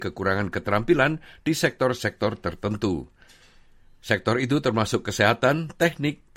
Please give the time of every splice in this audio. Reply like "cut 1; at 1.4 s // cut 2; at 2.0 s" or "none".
none